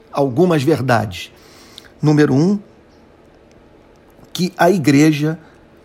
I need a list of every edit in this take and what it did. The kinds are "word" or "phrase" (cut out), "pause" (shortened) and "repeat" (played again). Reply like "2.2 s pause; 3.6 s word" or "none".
none